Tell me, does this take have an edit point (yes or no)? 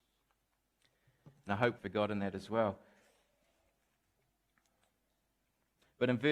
yes